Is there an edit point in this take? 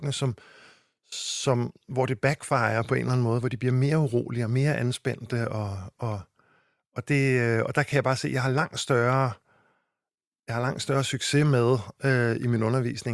no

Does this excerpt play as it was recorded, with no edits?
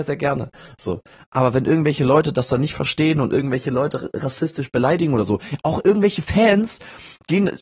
yes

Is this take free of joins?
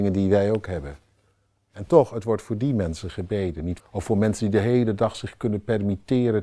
no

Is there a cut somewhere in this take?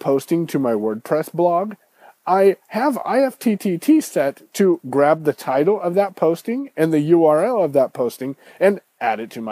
no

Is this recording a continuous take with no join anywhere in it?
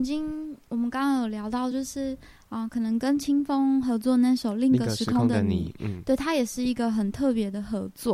yes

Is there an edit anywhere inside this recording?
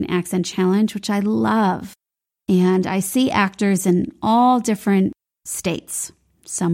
no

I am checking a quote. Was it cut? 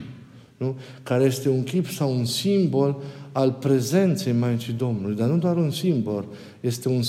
no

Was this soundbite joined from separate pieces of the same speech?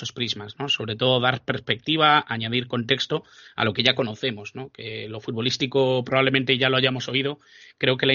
no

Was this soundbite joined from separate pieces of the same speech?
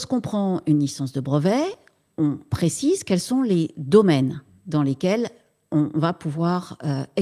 no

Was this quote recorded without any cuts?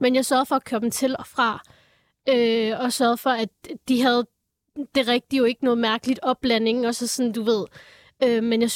yes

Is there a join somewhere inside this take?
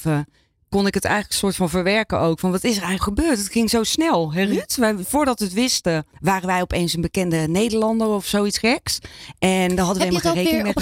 yes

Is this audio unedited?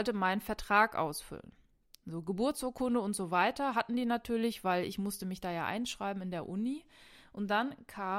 yes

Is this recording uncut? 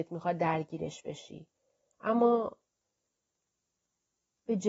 yes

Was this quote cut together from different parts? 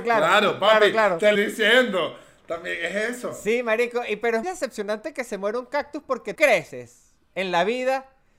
yes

